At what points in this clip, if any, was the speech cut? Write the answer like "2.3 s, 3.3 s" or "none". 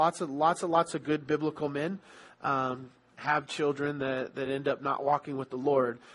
none